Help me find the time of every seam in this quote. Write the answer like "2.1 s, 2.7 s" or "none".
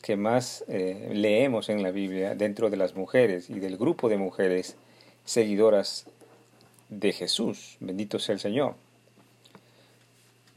none